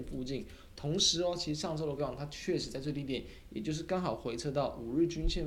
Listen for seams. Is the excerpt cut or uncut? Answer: cut